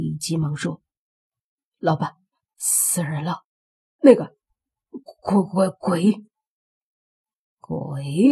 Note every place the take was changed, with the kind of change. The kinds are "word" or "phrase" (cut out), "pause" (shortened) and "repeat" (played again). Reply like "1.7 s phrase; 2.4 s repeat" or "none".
none